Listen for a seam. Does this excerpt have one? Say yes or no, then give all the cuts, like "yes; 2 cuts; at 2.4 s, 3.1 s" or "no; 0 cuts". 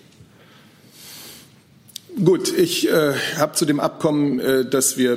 no; 0 cuts